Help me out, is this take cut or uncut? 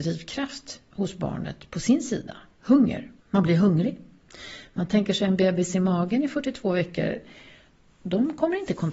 cut